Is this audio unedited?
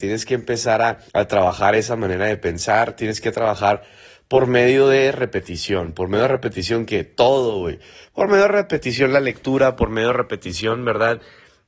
no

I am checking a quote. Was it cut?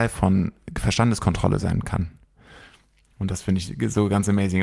no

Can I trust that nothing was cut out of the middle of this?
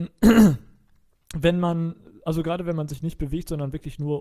yes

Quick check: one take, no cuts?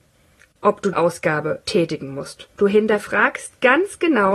no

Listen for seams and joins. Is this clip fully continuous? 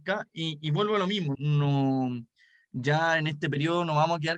no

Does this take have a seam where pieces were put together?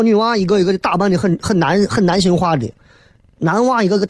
no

